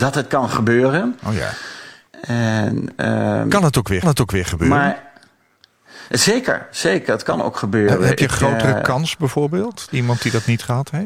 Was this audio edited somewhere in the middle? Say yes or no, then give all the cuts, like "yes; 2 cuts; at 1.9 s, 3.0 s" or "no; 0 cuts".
yes; 3 cuts; at 2.1 s, 4.0 s, 9.9 s